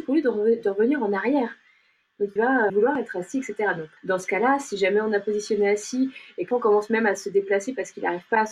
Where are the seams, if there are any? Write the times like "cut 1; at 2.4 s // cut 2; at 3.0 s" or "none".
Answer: cut 1; at 2.4 s // cut 2; at 2.7 s // cut 3; at 4.0 s // cut 4; at 6.5 s